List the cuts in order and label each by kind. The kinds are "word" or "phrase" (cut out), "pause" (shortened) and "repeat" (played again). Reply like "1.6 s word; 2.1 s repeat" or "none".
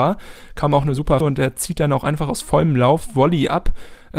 1.2 s word